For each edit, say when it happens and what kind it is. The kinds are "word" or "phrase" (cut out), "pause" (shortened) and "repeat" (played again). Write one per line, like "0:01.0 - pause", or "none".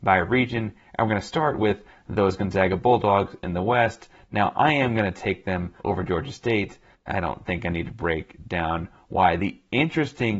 0:05.8 - pause
0:06.9 - pause

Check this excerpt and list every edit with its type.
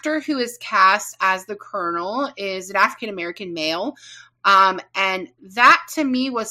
none

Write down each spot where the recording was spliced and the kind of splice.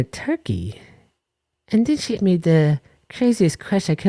0:02.2 - word

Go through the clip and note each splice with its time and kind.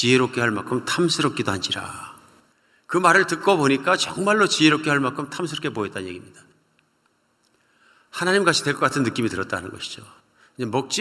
0:02.5 - pause

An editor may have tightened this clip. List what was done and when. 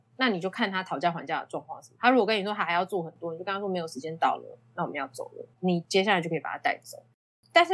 0:05.5 - pause

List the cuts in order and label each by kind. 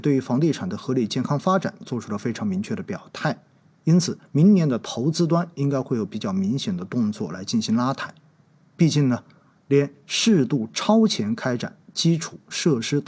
0:04.3 - pause

